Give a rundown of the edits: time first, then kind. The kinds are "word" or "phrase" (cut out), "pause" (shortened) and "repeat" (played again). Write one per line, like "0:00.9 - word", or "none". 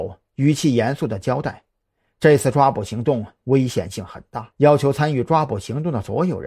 0:04.5 - pause